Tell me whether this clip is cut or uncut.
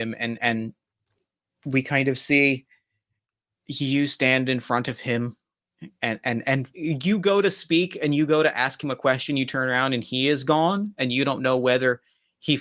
cut